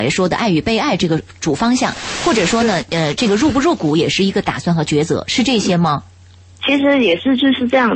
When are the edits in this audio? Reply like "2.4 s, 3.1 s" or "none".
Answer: none